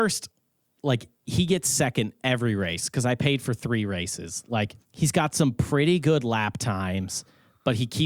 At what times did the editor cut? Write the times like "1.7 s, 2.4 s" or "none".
4.8 s